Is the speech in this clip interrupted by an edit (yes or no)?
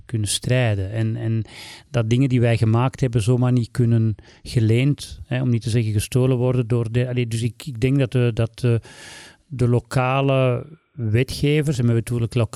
no